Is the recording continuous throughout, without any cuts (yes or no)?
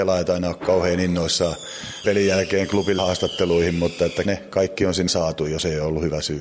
no